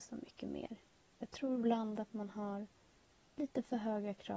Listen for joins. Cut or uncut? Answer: uncut